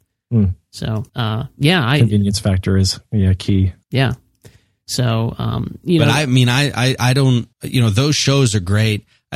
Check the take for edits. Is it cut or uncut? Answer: cut